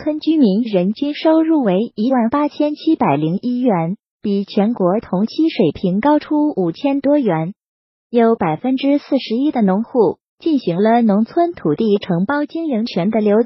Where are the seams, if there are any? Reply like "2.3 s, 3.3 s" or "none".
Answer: none